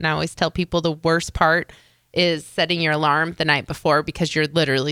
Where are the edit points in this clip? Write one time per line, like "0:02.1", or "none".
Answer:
none